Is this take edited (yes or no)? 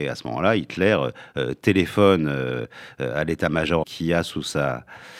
yes